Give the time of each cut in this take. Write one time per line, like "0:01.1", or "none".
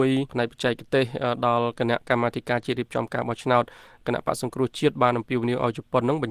none